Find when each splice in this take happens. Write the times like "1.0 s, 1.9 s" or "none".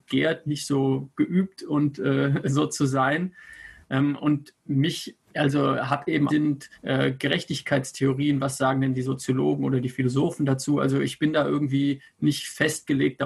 5.2 s, 6.3 s, 6.7 s